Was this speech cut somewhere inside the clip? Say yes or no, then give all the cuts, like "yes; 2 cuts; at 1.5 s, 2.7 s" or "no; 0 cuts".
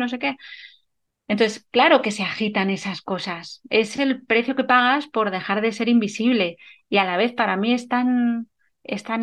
no; 0 cuts